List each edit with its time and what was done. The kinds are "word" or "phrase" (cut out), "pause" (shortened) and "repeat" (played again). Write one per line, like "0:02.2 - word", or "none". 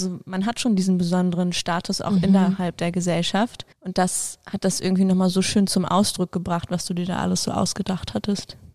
0:03.7 - pause